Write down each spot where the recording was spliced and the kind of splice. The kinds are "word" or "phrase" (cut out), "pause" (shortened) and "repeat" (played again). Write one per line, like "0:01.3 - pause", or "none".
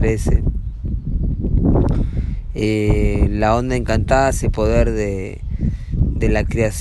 0:04.4 - phrase

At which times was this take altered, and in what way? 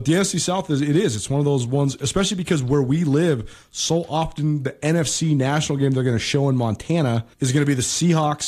0:07.3 - pause

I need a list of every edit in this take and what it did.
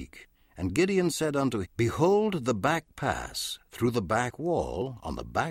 0:01.6 - word

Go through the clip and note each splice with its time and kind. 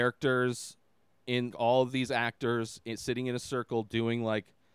0:01.5 - word

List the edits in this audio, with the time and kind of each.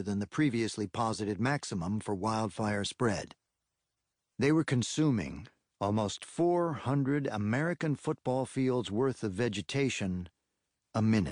none

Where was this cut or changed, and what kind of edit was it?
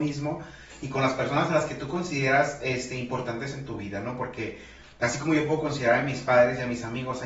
none

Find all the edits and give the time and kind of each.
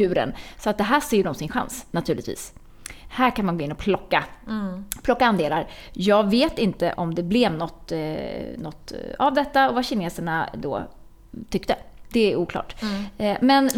0:06.9 - word

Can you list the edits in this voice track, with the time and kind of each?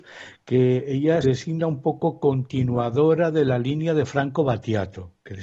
0:01.2 - word

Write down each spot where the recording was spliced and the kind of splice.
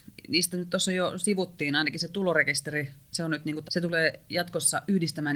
0:03.6 - word

